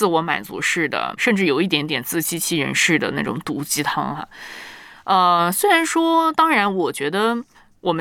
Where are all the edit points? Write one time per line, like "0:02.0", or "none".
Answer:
0:01.2

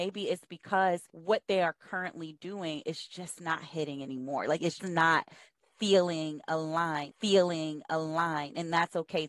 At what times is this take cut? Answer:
0:01.1
0:04.8
0:07.1

